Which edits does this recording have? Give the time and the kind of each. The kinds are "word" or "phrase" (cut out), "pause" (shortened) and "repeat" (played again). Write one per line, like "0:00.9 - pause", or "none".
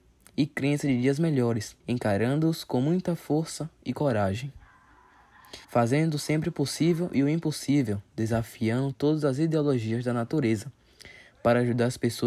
0:01.8 - pause
0:05.6 - pause